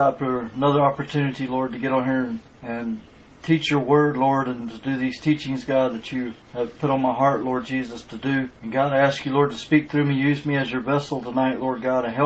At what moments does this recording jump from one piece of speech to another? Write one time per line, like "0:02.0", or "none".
0:02.5
0:06.4
0:08.6